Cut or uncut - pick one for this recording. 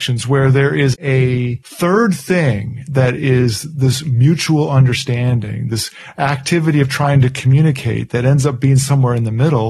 uncut